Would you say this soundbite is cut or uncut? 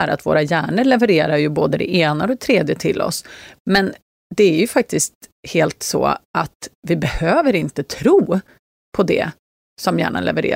uncut